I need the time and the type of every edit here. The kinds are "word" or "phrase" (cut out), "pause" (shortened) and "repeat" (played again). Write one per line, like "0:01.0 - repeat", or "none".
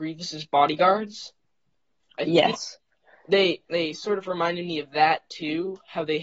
none